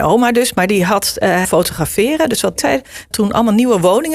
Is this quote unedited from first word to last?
no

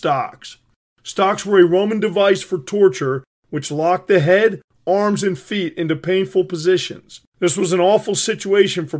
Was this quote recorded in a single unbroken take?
no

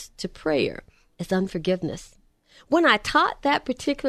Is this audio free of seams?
yes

